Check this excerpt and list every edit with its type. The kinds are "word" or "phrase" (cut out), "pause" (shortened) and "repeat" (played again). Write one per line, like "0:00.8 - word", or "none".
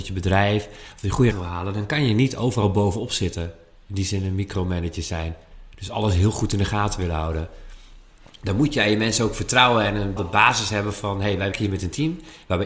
0:01.3 - word
0:10.2 - word
0:11.5 - word